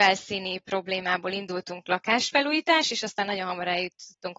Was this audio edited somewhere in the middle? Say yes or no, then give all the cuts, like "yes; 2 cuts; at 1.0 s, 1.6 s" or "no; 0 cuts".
no; 0 cuts